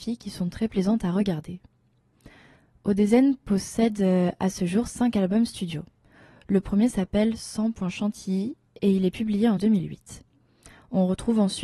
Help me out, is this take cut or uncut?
cut